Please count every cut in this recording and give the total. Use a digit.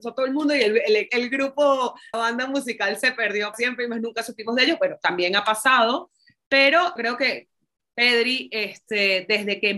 4